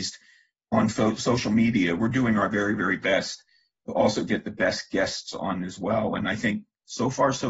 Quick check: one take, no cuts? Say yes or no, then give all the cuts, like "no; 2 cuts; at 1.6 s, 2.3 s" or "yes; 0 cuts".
yes; 0 cuts